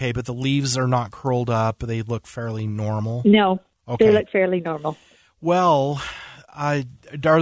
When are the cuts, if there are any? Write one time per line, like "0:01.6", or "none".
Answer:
none